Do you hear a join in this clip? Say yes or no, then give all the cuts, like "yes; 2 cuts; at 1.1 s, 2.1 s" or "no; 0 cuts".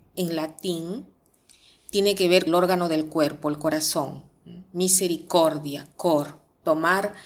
yes; 1 cut; at 2.5 s